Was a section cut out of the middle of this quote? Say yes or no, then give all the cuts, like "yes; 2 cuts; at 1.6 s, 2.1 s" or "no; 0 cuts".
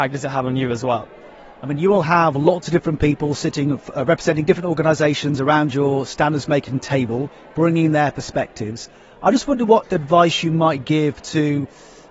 no; 0 cuts